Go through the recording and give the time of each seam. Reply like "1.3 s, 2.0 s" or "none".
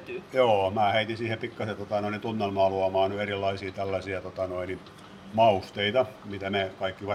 none

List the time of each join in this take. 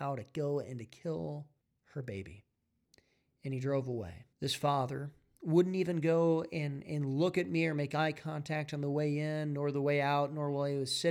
1.6 s, 2.8 s, 4.3 s

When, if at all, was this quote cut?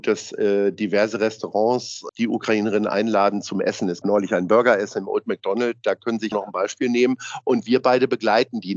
2.1 s, 4.0 s, 6.3 s

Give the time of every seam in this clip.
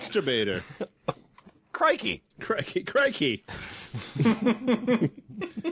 2.3 s

